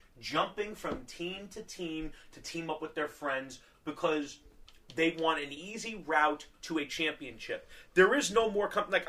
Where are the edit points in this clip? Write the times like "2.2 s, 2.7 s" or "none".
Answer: none